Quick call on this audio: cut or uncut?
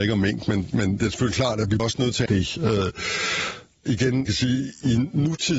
cut